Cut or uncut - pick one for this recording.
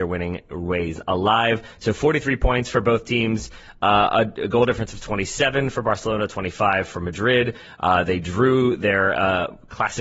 uncut